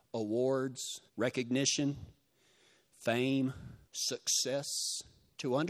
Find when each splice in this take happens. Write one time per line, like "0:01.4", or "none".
0:01.1
0:03.9